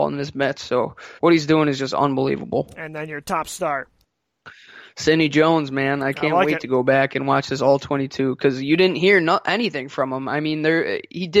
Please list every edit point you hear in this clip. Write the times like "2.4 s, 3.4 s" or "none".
1.2 s